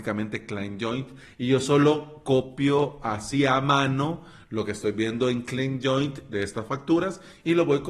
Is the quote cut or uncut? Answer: uncut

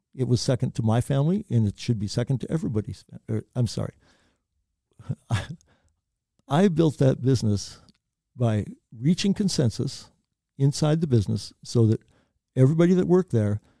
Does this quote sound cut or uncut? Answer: uncut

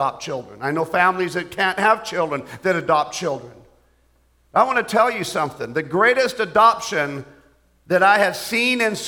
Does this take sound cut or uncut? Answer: uncut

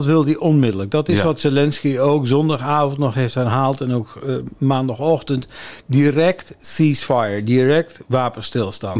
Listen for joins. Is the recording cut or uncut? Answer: uncut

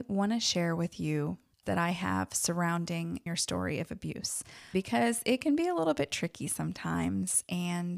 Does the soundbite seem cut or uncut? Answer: cut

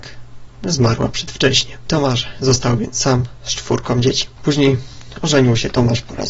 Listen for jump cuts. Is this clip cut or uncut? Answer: uncut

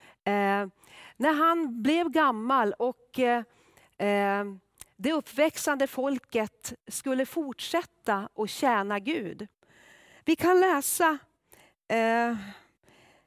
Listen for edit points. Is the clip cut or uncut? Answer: uncut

